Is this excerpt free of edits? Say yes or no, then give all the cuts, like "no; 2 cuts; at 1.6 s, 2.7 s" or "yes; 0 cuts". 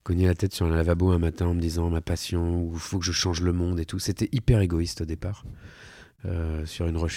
yes; 0 cuts